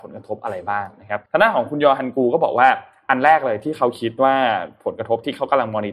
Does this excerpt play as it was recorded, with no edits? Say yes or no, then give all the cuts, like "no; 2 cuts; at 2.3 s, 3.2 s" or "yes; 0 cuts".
no; 1 cut; at 1.3 s